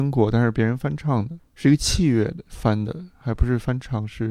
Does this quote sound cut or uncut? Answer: cut